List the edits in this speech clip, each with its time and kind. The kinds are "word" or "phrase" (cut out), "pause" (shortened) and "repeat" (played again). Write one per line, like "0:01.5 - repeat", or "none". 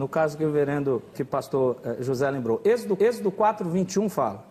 0:01.1 - word
0:03.0 - repeat